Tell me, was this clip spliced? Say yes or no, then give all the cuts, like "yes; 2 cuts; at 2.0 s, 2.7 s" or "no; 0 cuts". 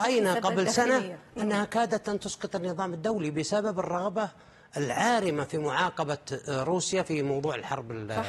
no; 0 cuts